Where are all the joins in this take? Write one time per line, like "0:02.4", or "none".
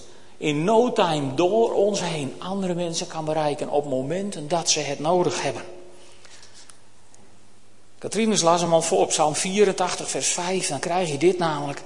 none

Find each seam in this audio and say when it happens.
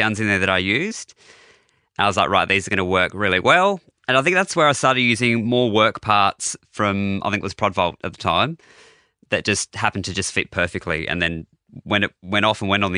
none

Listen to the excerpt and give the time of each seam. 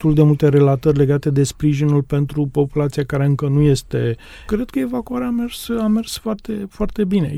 0:04.5

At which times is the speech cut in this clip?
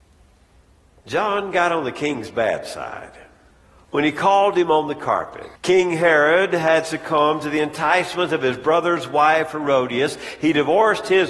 0:03.5
0:05.6

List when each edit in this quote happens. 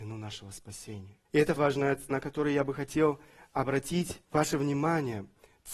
0:01.2
0:01.6
0:02.1
0:04.2

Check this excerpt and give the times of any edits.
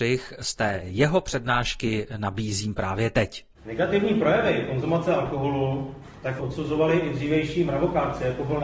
0:03.5
0:06.4

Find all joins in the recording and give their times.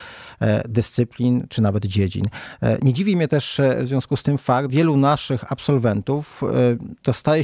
0:04.7

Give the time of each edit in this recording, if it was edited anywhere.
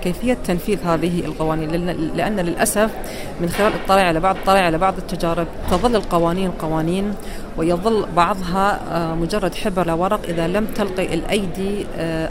0:04.3
0:09.9

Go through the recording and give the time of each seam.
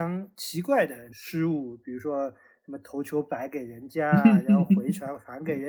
none

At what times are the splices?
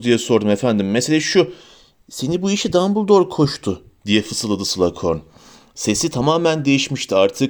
none

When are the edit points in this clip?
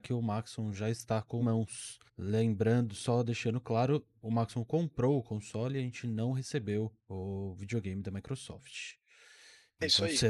0:01.4
0:02.1
0:07.0

